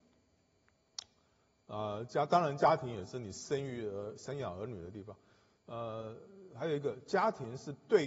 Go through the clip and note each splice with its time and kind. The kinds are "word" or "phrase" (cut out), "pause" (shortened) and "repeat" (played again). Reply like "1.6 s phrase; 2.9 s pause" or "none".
none